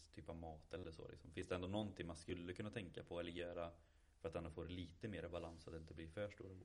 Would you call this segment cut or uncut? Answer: uncut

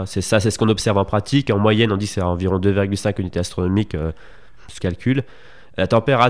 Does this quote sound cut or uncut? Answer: cut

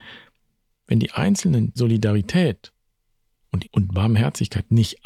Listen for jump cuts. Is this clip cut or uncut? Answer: cut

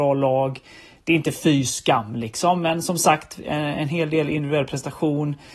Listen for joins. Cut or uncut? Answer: uncut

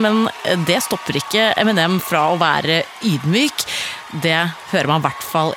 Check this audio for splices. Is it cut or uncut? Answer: uncut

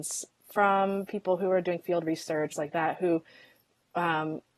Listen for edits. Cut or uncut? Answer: cut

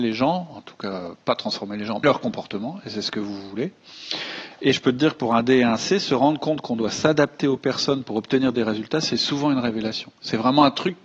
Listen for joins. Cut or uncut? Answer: cut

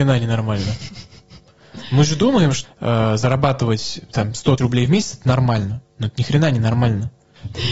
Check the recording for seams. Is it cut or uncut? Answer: cut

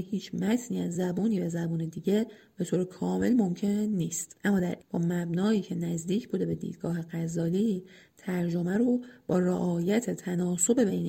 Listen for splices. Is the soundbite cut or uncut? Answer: cut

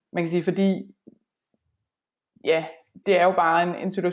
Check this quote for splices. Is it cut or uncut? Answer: cut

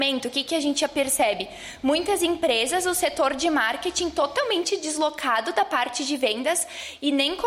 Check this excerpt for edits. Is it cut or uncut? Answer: uncut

